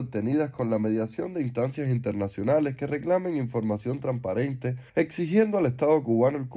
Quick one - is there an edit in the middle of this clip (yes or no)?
yes